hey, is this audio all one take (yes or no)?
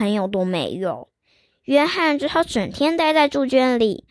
yes